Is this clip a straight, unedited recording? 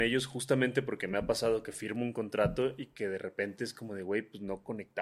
yes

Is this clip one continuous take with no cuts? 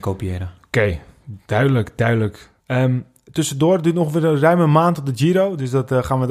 no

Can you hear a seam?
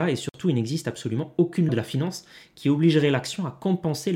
yes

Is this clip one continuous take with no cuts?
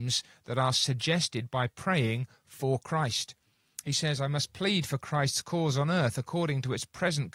yes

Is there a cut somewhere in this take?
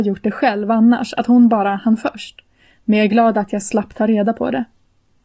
no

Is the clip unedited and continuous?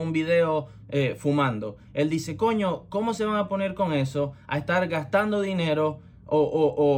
yes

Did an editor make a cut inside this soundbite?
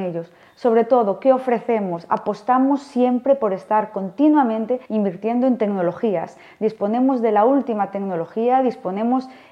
yes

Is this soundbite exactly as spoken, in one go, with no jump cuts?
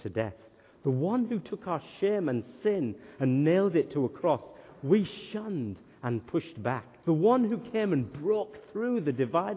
no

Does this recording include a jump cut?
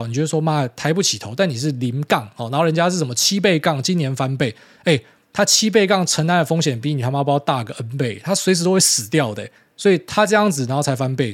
no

